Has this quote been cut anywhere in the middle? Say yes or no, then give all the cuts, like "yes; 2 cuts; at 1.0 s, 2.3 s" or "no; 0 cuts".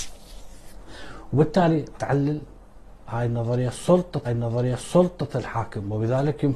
yes; 2 cuts; at 1.9 s, 4.2 s